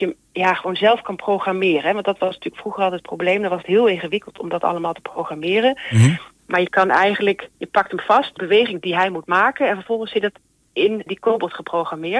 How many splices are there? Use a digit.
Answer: 3